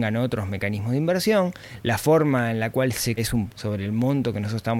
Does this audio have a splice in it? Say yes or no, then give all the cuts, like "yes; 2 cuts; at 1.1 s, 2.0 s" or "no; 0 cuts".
yes; 2 cuts; at 3.2 s, 3.5 s